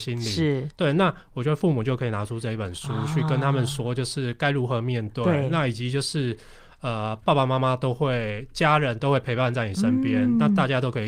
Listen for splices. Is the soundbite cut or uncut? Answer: uncut